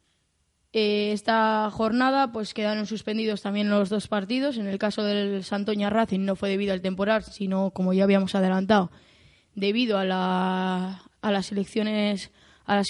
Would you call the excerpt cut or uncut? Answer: uncut